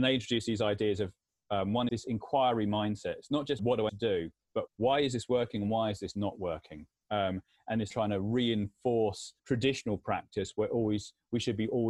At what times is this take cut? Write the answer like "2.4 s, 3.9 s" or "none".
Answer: 1.9 s, 3.6 s, 3.9 s, 4.7 s, 7.9 s, 9.4 s